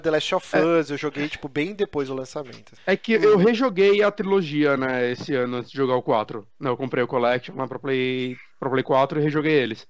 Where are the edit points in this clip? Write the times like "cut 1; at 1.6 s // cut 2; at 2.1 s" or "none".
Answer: none